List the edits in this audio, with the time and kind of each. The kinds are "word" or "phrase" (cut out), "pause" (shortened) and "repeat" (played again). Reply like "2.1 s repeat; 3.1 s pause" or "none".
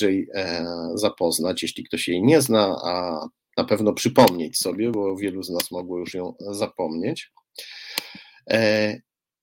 none

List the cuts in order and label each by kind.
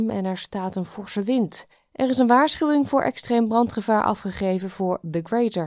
1.7 s pause

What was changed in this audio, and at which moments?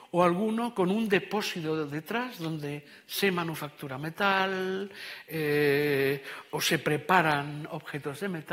none

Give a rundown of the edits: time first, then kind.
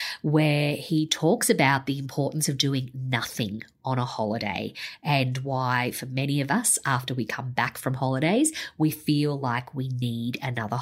none

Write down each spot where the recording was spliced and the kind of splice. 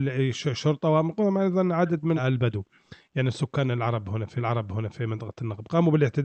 2.2 s word; 4.4 s repeat

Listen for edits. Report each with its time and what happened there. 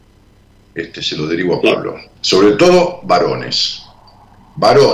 2.2 s pause

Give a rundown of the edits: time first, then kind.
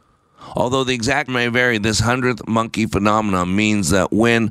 1.3 s word

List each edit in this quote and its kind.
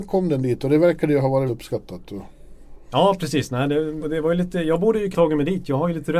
1.5 s word; 4.0 s word; 5.1 s word

